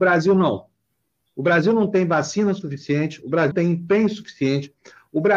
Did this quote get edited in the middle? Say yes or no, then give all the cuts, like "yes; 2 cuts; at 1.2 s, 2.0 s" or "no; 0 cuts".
yes; 1 cut; at 3.5 s